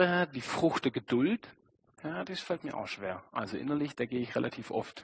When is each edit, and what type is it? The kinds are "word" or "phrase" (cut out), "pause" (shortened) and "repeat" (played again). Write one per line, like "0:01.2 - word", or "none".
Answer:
0:01.8 - pause